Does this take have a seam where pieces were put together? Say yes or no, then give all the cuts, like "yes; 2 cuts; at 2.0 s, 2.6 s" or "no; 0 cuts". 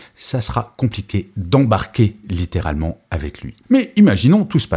yes; 1 cut; at 3.6 s